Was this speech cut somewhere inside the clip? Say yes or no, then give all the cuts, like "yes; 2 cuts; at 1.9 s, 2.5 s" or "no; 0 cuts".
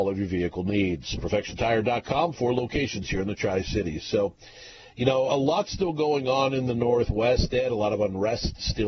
yes; 1 cut; at 5.3 s